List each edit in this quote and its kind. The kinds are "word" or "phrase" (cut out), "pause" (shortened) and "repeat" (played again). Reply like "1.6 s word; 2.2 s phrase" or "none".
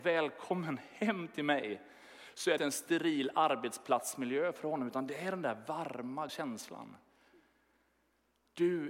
2.6 s word; 6.3 s word